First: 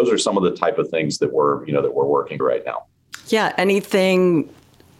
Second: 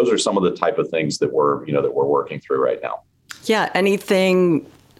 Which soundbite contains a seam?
first; 1 cut; at 2.4 s

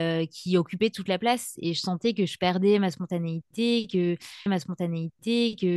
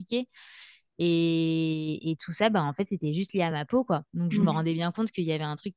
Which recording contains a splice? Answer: first; 1 cut; at 4.5 s

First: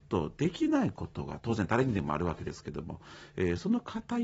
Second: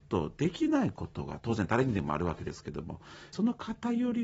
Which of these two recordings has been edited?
second; 1 cut; at 3.3 s

